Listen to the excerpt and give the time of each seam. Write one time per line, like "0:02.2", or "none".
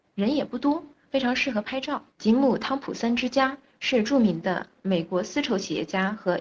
0:02.1